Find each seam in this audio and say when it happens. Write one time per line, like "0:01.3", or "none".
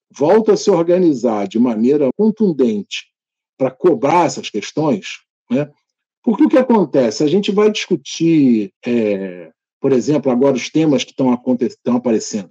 0:02.1
0:08.8